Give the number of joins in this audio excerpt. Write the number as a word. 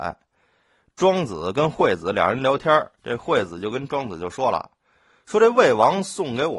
one